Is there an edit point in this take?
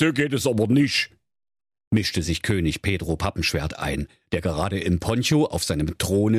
no; 0 cuts

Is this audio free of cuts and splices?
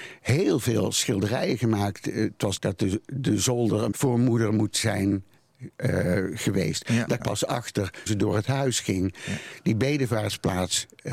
no; 4 cuts; at 2.6 s, 3.9 s, 7.2 s, 8.1 s

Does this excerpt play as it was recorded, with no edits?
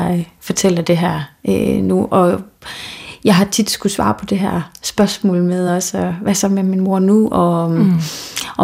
yes; 0 cuts

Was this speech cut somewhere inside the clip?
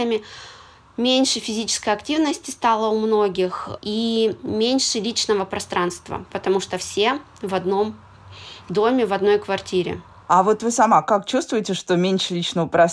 no; 0 cuts

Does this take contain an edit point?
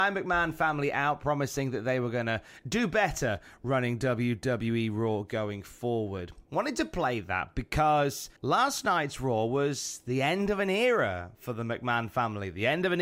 yes; 2 cuts; at 6.4 s, 8.4 s

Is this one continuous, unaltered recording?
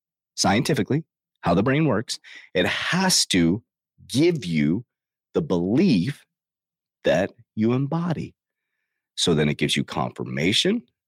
yes; 0 cuts

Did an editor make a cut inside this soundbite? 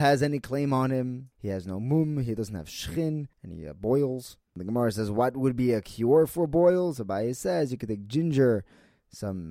yes; 3 cuts; at 1.3 s, 3.3 s, 4.5 s

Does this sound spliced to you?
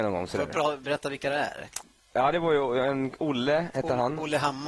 no; 0 cuts

